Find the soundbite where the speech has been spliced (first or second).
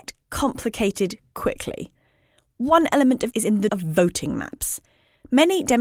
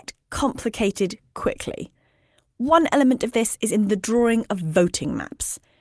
first